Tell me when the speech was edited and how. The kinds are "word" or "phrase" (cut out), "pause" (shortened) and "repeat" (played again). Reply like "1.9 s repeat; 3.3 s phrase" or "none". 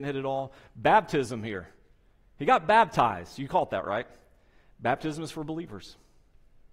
none